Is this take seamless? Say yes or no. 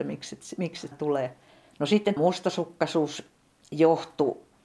no